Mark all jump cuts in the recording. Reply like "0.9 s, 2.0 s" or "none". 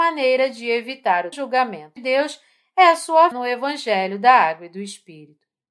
1.3 s, 2.0 s, 3.3 s